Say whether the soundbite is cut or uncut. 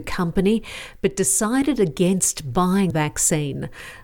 cut